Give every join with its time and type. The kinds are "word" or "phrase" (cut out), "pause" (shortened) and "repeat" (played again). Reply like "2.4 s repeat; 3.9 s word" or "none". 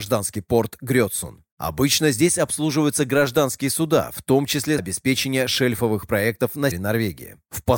4.8 s word; 6.7 s word